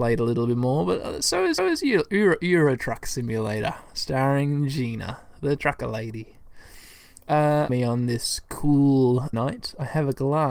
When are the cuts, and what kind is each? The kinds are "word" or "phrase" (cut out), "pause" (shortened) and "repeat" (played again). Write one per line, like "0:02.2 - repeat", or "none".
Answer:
0:01.6 - repeat
0:07.7 - word
0:09.3 - word